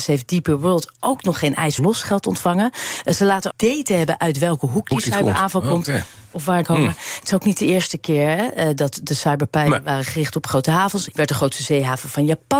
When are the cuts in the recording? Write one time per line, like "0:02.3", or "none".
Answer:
0:01.8
0:03.5
0:06.6
0:11.1